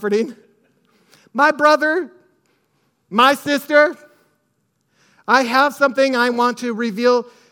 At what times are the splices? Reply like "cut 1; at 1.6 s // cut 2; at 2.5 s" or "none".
none

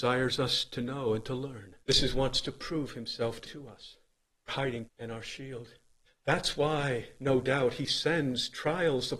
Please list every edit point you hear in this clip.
cut 1; at 1.8 s // cut 2; at 2.1 s // cut 3; at 3.4 s // cut 4; at 4.5 s // cut 5; at 4.9 s // cut 6; at 6.1 s

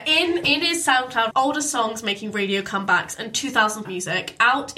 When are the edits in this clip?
cut 1; at 1.3 s // cut 2; at 3.8 s

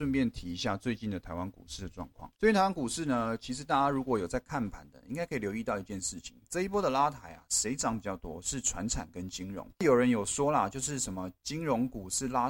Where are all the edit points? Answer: cut 1; at 2.3 s

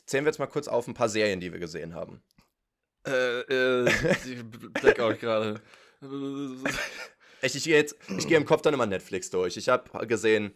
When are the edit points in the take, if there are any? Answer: none

